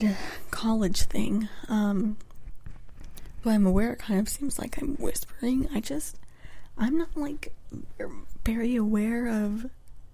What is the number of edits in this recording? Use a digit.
1